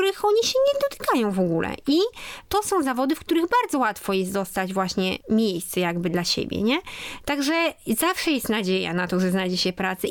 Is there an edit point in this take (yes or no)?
no